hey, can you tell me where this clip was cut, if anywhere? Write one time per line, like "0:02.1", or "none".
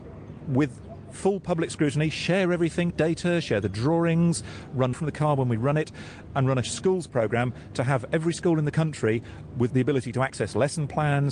0:02.9
0:04.9
0:06.6
0:09.7